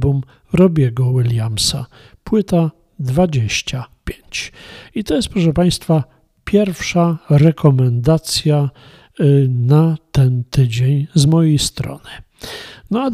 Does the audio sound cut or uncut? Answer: uncut